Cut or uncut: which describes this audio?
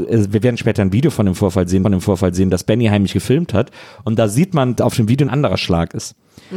cut